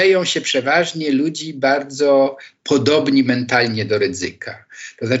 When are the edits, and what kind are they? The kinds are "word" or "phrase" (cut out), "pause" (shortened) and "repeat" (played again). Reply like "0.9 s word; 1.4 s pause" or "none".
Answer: none